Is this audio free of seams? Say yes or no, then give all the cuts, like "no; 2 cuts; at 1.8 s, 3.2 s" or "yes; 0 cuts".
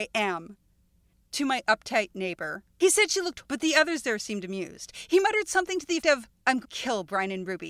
no; 4 cuts; at 2.7 s, 3.4 s, 6.0 s, 6.6 s